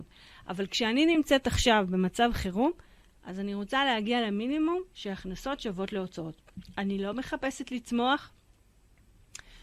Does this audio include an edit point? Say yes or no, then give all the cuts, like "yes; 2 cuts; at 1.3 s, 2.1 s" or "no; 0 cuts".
no; 0 cuts